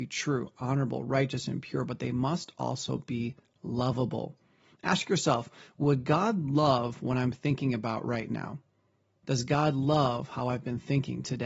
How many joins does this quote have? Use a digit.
0